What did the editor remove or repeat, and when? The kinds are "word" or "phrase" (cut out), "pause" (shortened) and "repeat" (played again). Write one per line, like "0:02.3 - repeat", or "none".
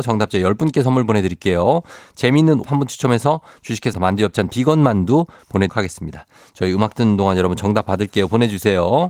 0:02.6 - word
0:03.9 - word
0:05.7 - word